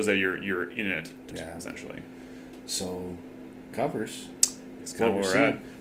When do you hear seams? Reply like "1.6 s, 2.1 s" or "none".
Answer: 1.3 s, 3.7 s